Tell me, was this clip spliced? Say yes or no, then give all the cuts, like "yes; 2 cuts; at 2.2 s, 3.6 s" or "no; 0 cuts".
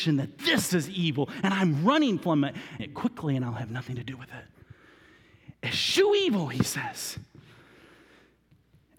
yes; 1 cut; at 2.8 s